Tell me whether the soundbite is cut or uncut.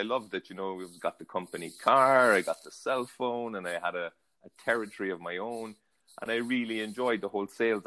uncut